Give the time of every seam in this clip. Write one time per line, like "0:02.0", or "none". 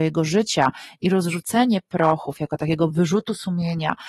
none